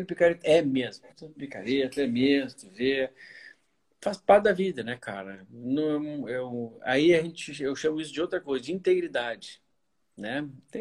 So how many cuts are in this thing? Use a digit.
0